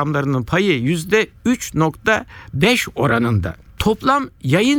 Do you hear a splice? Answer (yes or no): no